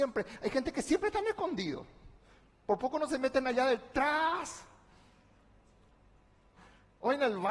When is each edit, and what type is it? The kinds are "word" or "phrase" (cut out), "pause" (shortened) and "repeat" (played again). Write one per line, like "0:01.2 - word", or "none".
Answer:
none